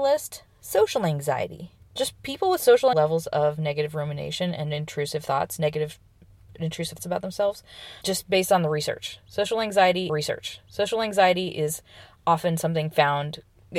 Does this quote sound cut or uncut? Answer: cut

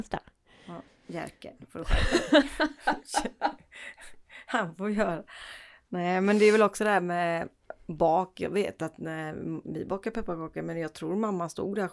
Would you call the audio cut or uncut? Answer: uncut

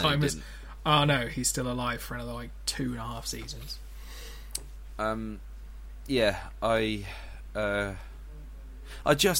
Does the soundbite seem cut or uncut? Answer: uncut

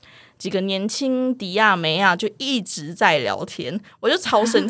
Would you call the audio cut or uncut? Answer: uncut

